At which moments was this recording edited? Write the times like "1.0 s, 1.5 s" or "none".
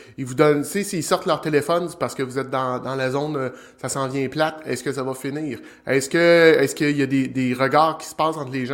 none

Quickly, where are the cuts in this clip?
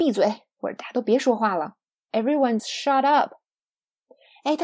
2.6 s

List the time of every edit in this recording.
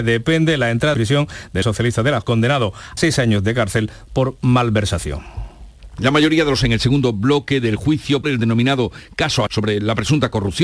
0.9 s, 1.6 s, 2.2 s, 3.0 s, 6.6 s, 8.2 s, 9.5 s

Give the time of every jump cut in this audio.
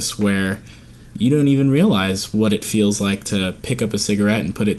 none

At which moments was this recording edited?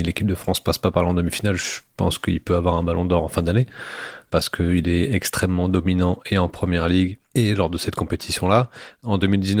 none

